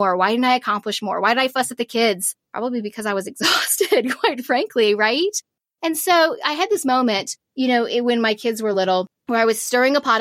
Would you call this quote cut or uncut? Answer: uncut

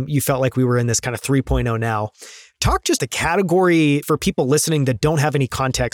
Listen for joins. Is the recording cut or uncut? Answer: cut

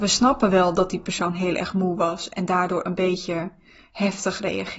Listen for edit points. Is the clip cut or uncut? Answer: uncut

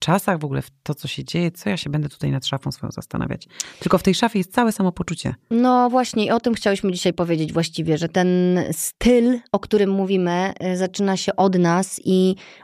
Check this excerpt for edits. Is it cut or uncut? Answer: uncut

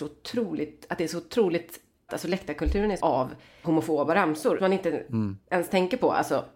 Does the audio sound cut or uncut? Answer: cut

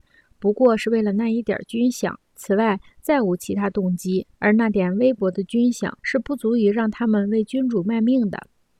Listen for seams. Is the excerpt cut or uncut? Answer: cut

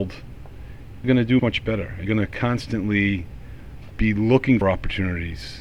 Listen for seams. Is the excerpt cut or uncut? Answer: cut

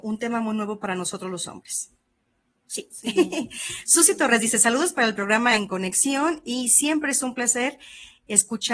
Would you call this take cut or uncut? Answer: uncut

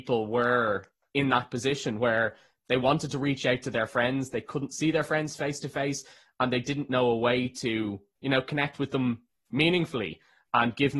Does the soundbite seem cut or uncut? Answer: uncut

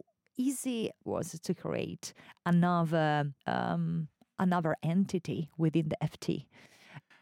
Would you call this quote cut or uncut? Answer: cut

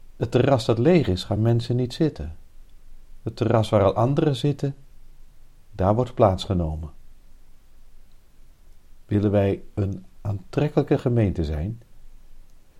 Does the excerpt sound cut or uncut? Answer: uncut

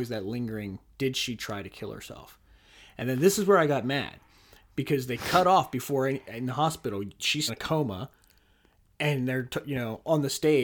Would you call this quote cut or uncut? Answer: cut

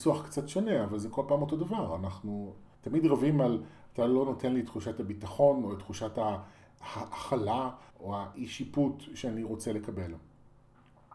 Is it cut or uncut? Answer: cut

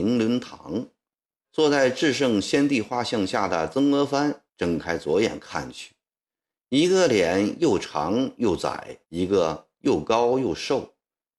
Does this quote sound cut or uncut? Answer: cut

